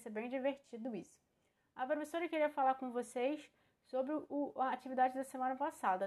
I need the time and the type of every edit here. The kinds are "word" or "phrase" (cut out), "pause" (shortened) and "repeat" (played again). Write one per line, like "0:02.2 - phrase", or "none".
none